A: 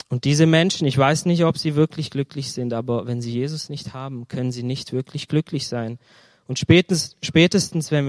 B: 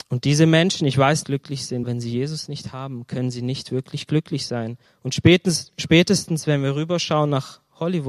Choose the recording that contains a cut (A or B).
B